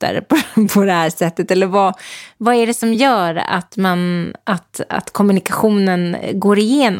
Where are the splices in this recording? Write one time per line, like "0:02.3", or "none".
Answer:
none